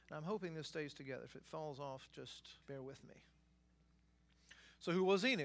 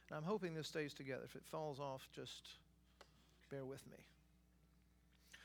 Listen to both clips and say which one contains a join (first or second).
first